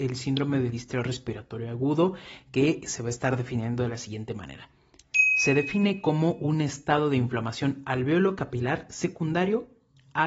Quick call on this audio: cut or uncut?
uncut